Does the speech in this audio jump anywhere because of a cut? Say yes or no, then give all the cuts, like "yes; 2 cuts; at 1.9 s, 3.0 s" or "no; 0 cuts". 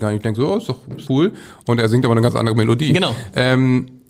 yes; 1 cut; at 1.1 s